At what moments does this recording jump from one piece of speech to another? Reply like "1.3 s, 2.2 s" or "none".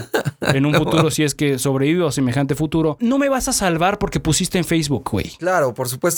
3.0 s